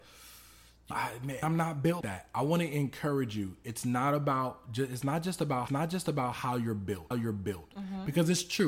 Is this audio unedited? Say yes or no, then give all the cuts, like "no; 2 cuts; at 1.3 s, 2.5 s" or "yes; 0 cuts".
no; 5 cuts; at 0.9 s, 1.4 s, 2.0 s, 5.7 s, 7.1 s